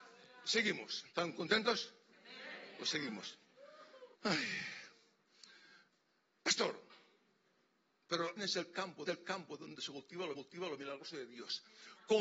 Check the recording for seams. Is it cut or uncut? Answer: cut